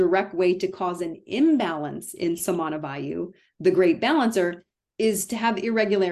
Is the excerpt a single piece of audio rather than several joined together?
yes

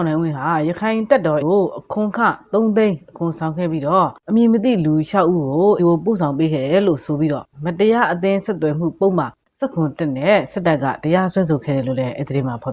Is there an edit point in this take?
yes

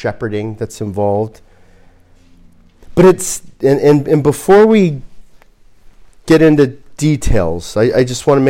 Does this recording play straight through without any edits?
yes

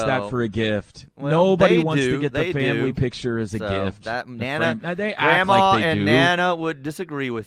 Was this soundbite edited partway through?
no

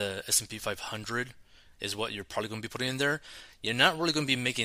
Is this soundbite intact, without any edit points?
yes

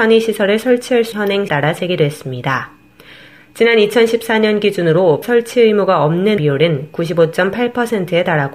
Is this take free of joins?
no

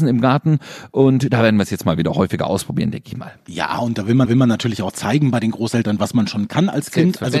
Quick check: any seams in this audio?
yes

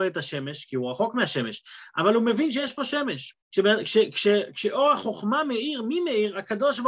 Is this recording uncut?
no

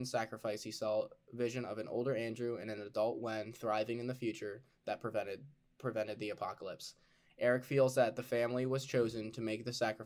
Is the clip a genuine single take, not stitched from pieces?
yes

